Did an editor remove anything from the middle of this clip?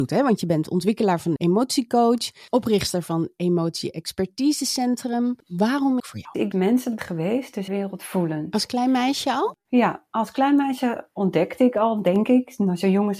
yes; 5 cuts; at 1.4 s, 6.0 s, 6.5 s, 7.0 s, 7.7 s

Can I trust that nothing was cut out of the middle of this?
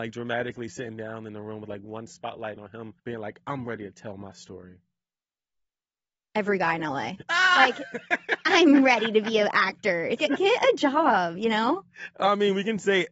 no; 2 cuts; at 3.0 s, 10.2 s

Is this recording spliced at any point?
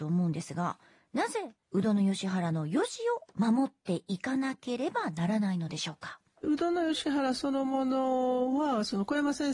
yes; 1 cut; at 1.6 s

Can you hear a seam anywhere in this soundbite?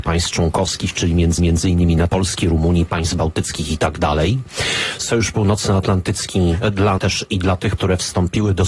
yes; 4 cuts; at 1.4 s, 2.1 s, 7.0 s, 7.8 s

